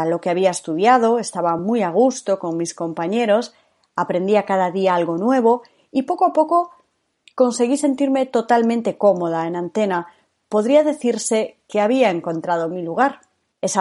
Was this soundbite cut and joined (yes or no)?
no